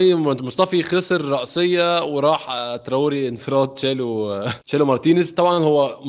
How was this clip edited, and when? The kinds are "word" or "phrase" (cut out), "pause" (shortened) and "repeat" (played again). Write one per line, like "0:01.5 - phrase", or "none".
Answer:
0:04.6 - pause